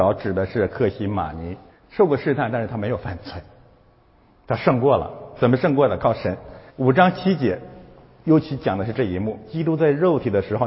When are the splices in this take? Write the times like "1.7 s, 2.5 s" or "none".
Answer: 1.7 s, 6.7 s